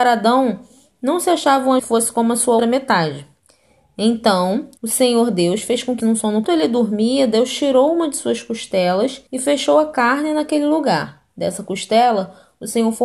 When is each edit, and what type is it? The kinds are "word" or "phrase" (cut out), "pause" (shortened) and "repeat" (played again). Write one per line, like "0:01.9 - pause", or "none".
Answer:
0:01.8 - phrase
0:02.6 - word
0:04.8 - pause
0:06.0 - phrase
0:06.4 - phrase
0:09.3 - pause